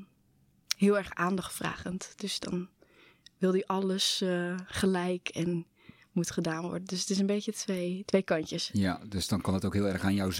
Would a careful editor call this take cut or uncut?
uncut